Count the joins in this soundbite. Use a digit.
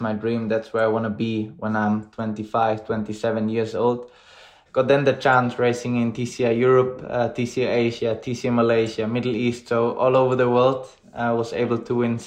0